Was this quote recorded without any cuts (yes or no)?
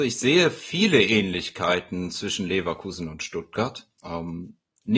yes